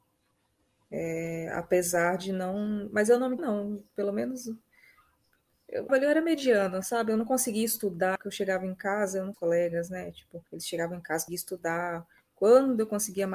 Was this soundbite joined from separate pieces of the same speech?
yes; 6 cuts; at 3.4 s, 5.9 s, 8.2 s, 9.3 s, 10.5 s, 11.3 s

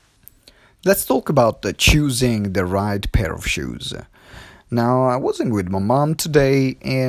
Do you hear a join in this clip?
no; 0 cuts

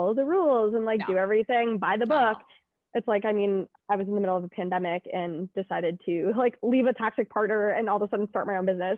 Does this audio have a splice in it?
no; 0 cuts

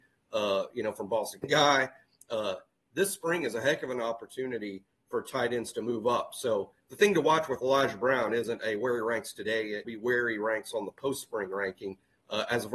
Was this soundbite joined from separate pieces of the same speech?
yes; 1 cut; at 9.8 s

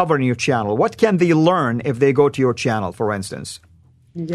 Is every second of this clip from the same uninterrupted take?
yes; 0 cuts

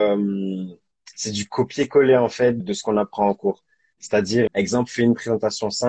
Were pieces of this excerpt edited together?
yes; 2 cuts; at 2.6 s, 4.5 s

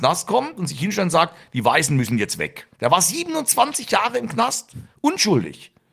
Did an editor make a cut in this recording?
yes; 1 cut; at 2.7 s

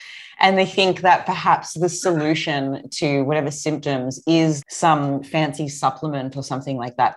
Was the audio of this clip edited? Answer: yes; 1 cut; at 4.6 s

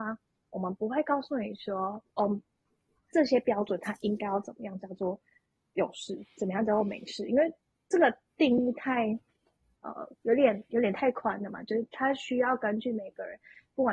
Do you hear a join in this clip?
no; 0 cuts

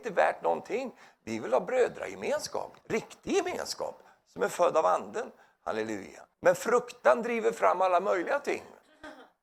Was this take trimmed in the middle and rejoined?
yes; 2 cuts; at 2.8 s, 6.3 s

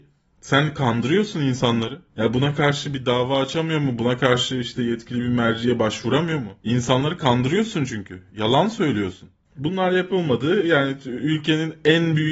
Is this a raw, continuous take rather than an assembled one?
no; 2 cuts; at 2.1 s, 6.6 s

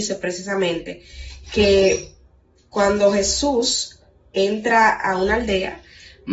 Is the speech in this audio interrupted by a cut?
no; 0 cuts

